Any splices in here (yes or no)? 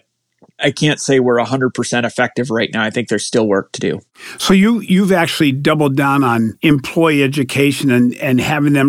no